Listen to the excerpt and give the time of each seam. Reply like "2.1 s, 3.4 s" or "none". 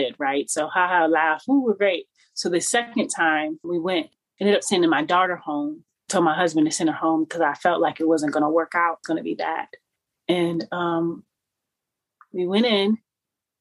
3.6 s, 9.0 s

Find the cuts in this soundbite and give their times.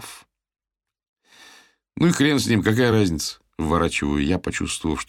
none

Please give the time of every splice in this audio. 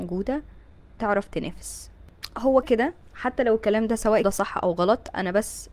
2.6 s, 4.2 s

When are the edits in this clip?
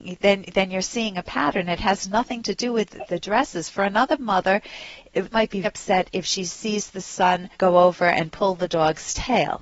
5.3 s, 5.6 s, 7.5 s

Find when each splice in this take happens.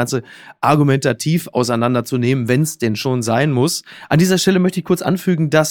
none

